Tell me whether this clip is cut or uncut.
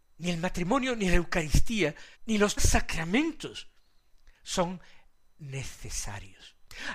cut